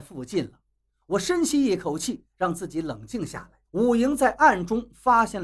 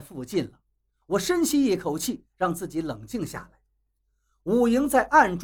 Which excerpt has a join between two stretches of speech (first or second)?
first